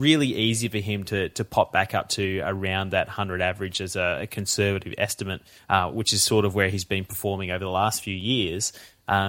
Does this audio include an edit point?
no; 0 cuts

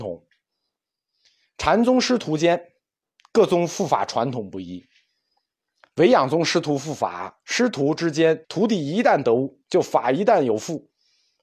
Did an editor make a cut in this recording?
yes; 1 cut; at 8.4 s

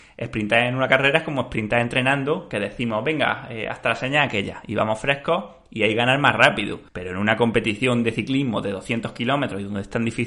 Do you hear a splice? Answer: yes; 1 cut; at 6.9 s

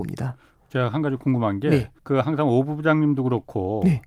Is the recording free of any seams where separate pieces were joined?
no; 1 cut; at 2.0 s

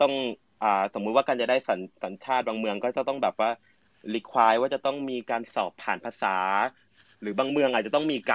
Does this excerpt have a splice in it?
no; 0 cuts

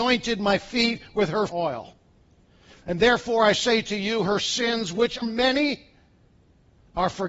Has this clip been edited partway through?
yes; 2 cuts; at 1.5 s, 5.2 s

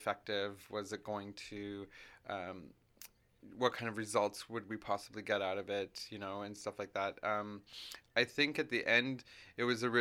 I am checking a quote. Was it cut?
no; 0 cuts

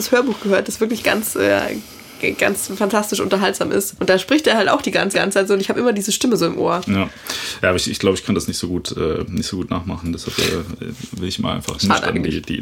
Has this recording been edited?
yes; 1 cut; at 5.1 s

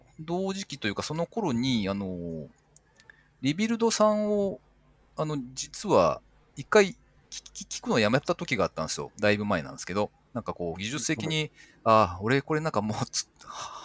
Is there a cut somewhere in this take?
no; 0 cuts

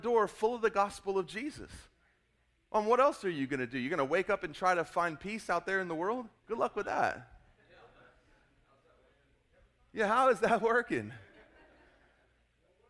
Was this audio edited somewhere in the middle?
yes; 1 cut; at 6.4 s

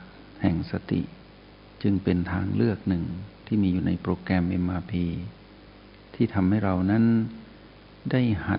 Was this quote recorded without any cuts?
yes; 0 cuts

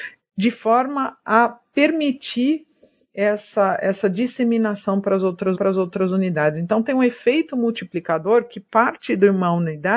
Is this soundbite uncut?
no; 1 cut; at 5.5 s

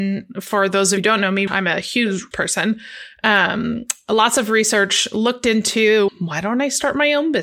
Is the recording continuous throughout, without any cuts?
no; 4 cuts; at 1.0 s, 1.5 s, 2.3 s, 6.1 s

